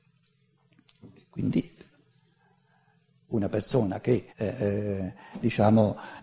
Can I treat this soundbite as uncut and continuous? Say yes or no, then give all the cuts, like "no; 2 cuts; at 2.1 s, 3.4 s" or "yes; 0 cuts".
no; 1 cut; at 4.3 s